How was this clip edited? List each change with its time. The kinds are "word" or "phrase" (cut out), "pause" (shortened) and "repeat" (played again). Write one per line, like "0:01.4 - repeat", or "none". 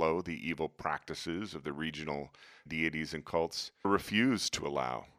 0:02.7 - word
0:03.8 - word